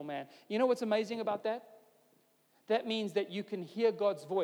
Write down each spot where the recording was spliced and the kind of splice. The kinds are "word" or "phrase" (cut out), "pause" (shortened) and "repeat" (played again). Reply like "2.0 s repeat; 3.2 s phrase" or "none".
none